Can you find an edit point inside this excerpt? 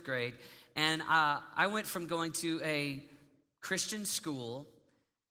no; 0 cuts

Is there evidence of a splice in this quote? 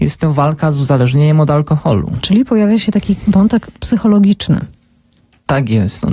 no; 0 cuts

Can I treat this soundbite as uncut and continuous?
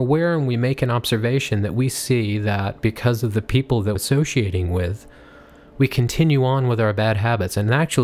no; 1 cut; at 4.0 s

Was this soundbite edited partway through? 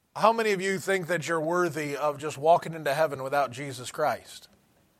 no; 0 cuts

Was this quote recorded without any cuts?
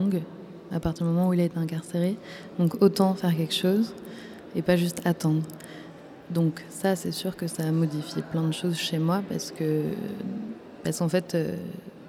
yes; 0 cuts

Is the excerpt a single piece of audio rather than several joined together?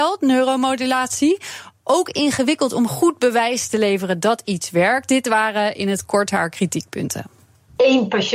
yes; 0 cuts

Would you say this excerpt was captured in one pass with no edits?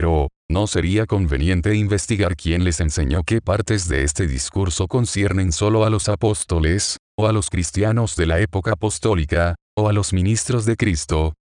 yes; 0 cuts

